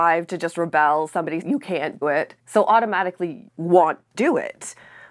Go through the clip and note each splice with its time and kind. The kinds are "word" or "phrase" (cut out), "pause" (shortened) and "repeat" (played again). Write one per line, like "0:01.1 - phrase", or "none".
0:01.4 - word
0:02.0 - word
0:02.4 - pause
0:03.5 - word
0:04.1 - word